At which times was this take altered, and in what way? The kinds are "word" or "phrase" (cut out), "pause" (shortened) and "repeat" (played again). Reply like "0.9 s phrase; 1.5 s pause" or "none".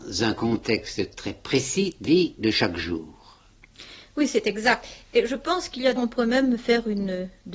2.0 s word; 6.0 s word